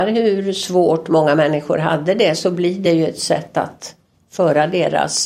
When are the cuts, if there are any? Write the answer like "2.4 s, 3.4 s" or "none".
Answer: none